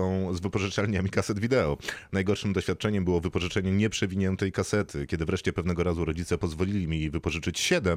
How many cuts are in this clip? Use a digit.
0